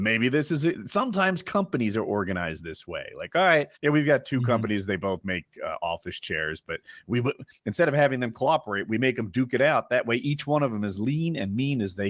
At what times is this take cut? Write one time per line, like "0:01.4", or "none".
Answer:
0:03.8